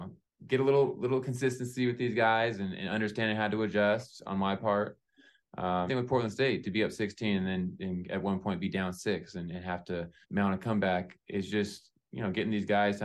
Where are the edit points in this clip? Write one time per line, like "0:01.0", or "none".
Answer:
0:05.9
0:10.2